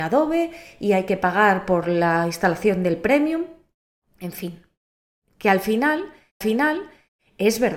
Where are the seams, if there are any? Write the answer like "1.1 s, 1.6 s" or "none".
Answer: 6.4 s